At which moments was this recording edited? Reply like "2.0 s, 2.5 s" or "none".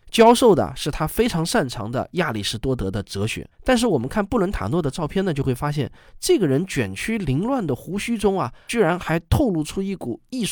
3.5 s